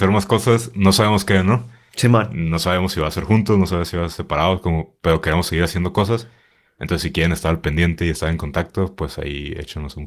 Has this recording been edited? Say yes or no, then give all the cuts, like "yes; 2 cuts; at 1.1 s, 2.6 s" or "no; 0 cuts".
no; 0 cuts